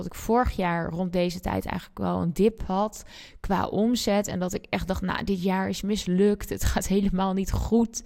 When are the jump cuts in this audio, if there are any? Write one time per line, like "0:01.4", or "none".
none